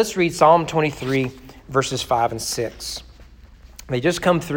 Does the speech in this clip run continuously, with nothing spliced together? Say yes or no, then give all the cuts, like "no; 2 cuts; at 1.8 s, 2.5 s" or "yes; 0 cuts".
yes; 0 cuts